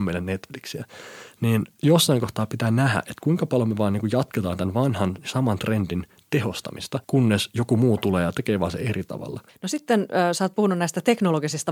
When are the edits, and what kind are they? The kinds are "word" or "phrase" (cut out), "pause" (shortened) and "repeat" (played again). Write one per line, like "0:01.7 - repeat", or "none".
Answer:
0:07.0 - pause
0:09.5 - pause